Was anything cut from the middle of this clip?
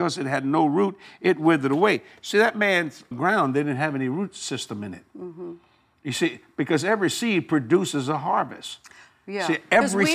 yes; 1 cut; at 3.1 s

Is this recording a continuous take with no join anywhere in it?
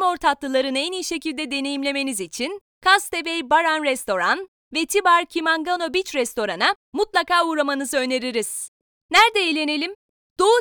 yes; 0 cuts

